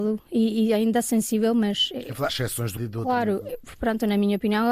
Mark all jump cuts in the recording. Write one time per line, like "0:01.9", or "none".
0:02.3
0:02.8
0:03.5

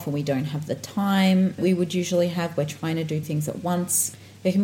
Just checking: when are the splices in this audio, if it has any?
0:01.6
0:03.2

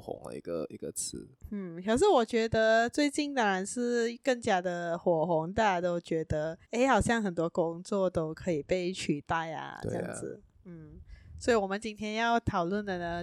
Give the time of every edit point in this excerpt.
0:06.6

